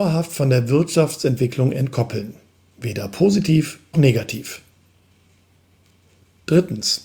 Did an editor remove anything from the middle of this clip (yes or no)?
yes